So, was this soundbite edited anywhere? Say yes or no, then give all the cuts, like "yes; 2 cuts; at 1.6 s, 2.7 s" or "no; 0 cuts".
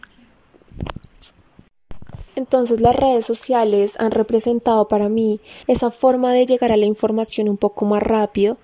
yes; 2 cuts; at 2.3 s, 5.6 s